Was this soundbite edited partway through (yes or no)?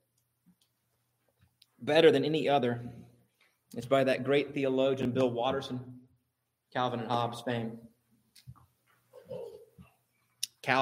no